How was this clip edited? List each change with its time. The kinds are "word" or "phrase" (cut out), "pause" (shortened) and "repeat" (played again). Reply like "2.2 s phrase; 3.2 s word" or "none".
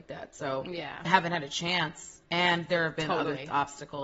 1.0 s word; 2.2 s pause